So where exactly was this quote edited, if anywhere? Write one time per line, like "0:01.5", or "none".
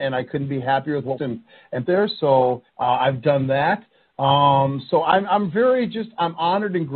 0:01.2
0:01.8
0:02.7